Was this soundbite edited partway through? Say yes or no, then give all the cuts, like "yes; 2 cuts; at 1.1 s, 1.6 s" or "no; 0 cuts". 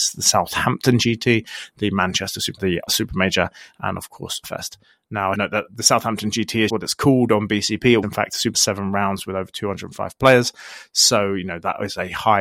yes; 7 cuts; at 2.6 s, 2.9 s, 4.4 s, 5.3 s, 6.7 s, 8.0 s, 8.5 s